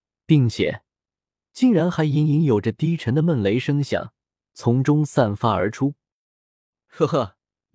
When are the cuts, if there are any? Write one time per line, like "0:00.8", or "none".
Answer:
none